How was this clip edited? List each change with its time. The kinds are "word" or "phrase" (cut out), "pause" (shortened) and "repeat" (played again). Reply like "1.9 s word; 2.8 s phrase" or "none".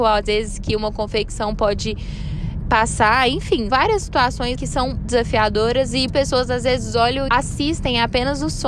2.6 s word; 3.7 s word; 4.5 s word; 5.0 s word; 6.1 s word; 7.3 s word